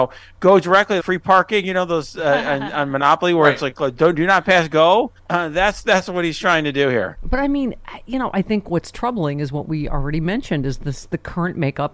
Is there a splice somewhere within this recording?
yes; 2 cuts; at 1.0 s, 5.2 s

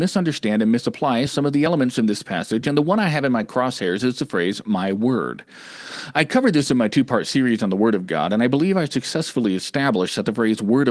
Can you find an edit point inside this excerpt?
no; 0 cuts

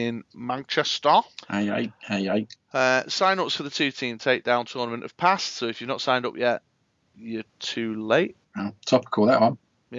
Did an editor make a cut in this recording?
yes; 2 cuts; at 7.5 s, 8.4 s

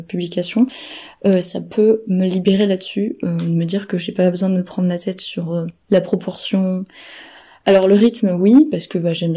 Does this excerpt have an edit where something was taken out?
no; 0 cuts

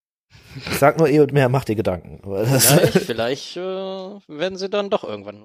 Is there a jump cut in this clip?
no; 0 cuts

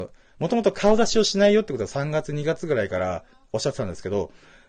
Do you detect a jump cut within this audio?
no; 0 cuts

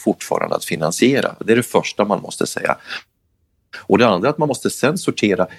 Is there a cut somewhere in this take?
no; 0 cuts

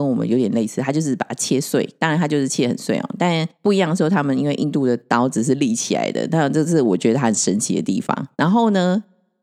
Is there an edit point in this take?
yes; 3 cuts; at 2.0 s, 3.5 s, 8.3 s

